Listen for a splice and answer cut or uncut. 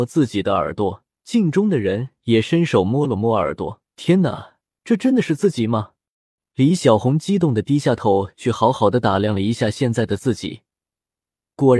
cut